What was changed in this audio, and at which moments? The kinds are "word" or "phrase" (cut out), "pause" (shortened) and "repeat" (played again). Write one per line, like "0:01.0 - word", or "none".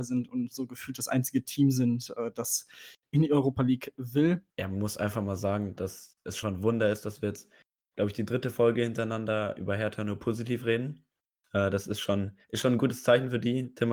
0:04.5 - pause
0:06.4 - word
0:12.4 - pause